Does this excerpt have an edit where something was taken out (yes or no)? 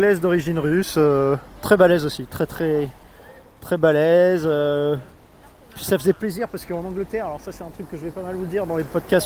no